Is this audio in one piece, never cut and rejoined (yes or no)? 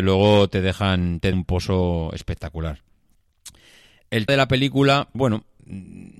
no